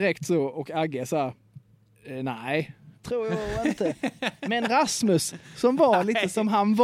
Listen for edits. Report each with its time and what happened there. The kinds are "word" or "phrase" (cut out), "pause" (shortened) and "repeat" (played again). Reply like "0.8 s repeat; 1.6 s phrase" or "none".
3.0 s word